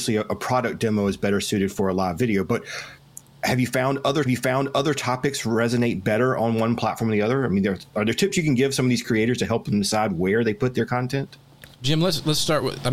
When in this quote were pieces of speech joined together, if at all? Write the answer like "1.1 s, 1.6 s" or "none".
4.3 s, 11.7 s